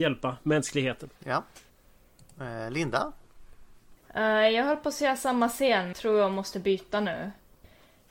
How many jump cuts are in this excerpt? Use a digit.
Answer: 2